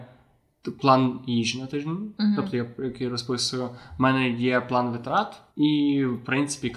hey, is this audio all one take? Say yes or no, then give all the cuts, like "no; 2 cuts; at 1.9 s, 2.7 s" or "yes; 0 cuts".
no; 1 cut; at 5.5 s